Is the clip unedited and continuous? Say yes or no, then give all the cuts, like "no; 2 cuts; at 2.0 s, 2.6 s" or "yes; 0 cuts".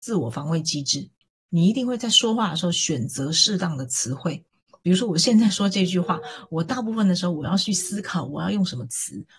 yes; 0 cuts